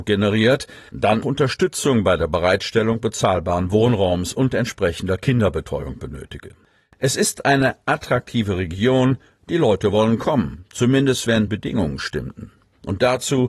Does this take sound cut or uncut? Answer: cut